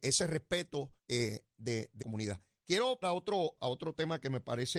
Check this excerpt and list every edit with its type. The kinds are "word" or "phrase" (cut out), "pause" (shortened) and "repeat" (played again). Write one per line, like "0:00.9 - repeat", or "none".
0:01.0 - pause
0:02.0 - word
0:03.0 - word
0:03.6 - word